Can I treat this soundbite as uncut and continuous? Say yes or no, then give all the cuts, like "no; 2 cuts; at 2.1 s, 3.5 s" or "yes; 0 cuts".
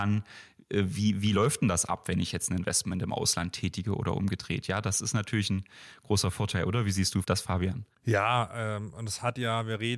no; 1 cut; at 7.9 s